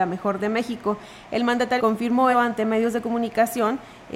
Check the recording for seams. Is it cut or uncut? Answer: cut